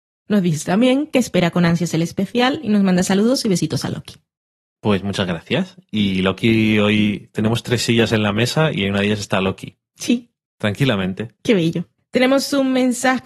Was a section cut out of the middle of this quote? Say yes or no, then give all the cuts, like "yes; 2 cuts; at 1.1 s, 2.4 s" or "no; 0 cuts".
no; 0 cuts